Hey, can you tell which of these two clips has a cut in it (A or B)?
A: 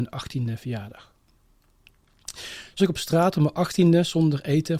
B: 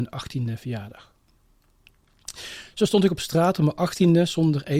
A